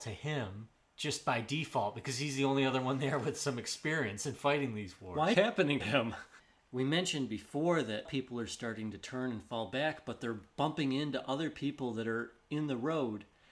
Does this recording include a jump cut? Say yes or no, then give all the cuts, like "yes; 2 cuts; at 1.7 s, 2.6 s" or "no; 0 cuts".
yes; 3 cuts; at 5.3 s, 5.8 s, 8.1 s